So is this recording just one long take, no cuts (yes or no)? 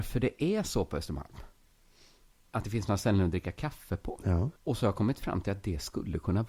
no